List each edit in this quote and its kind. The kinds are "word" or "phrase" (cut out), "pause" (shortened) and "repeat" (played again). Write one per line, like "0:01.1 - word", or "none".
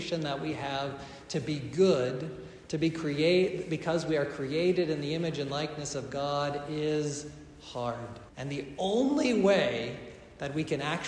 0:08.3 - pause